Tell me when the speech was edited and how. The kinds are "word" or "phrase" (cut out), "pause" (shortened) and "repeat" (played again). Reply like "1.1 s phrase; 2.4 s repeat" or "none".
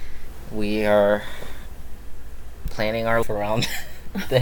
3.2 s word